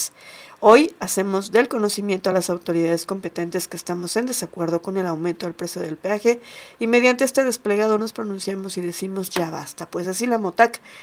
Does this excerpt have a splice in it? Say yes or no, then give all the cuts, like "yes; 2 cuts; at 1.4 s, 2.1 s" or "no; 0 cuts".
no; 0 cuts